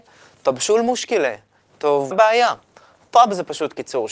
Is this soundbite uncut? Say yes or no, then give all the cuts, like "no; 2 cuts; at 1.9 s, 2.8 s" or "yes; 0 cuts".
no; 1 cut; at 2.1 s